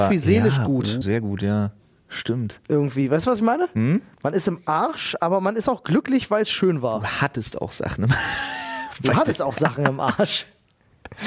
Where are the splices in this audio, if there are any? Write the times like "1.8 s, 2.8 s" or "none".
1.0 s

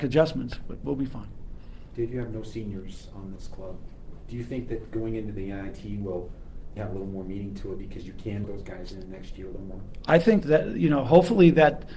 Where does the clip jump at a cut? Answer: 3.4 s, 6.8 s, 8.4 s, 10.4 s

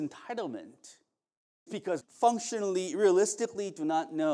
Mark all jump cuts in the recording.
1.7 s, 2.0 s

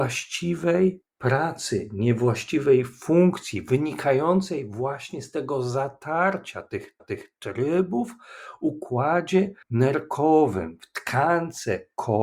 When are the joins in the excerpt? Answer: 1.1 s, 7.0 s, 9.6 s

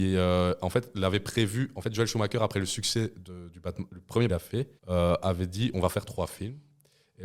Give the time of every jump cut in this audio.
4.3 s, 4.8 s, 5.7 s

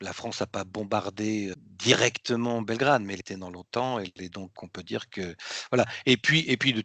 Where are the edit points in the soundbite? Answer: 1.5 s, 4.5 s

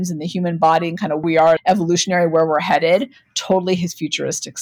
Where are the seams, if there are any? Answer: 1.2 s, 1.6 s

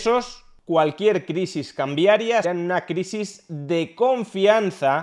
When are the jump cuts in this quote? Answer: 2.4 s

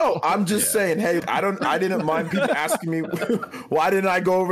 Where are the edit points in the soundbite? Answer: 1.2 s, 2.5 s

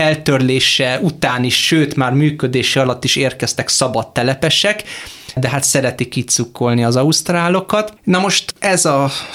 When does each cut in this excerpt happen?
8.0 s

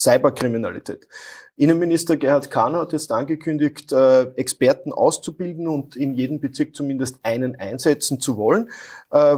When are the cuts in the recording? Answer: none

